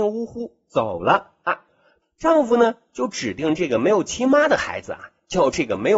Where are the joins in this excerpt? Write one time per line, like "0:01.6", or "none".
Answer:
none